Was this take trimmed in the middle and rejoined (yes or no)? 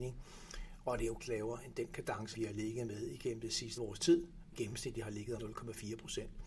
yes